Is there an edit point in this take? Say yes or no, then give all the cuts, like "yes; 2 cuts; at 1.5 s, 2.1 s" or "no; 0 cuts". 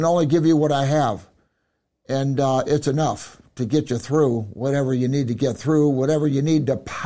no; 0 cuts